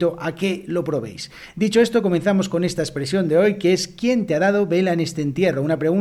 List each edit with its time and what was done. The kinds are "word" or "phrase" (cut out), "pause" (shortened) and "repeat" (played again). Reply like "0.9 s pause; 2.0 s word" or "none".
none